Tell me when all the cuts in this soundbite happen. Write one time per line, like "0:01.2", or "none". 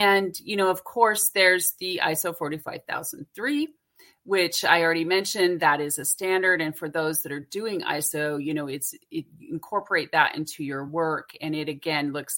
none